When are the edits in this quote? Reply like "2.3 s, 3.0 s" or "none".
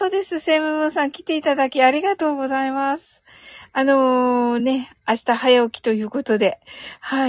none